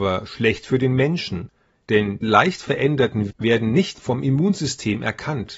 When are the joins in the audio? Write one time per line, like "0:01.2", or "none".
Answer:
0:02.2
0:03.3
0:04.0